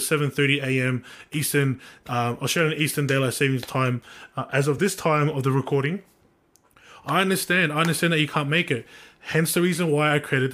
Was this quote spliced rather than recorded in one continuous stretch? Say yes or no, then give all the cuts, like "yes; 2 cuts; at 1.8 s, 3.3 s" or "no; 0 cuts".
no; 0 cuts